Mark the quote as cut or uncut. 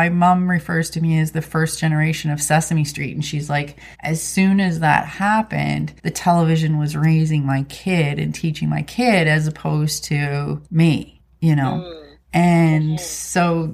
cut